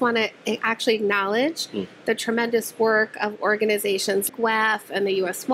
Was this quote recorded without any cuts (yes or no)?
no